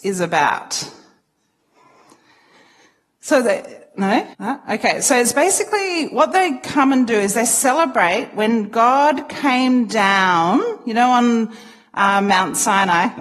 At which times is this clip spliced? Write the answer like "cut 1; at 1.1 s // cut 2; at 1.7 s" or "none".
cut 1; at 4.3 s